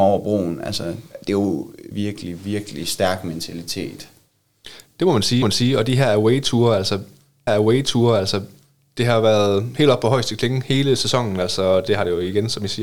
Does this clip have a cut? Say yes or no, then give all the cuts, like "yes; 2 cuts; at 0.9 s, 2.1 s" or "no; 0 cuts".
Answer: yes; 3 cuts; at 1.9 s, 5.4 s, 7.5 s